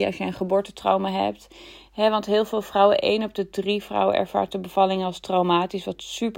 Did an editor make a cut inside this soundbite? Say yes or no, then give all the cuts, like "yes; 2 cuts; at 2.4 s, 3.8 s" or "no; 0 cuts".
no; 0 cuts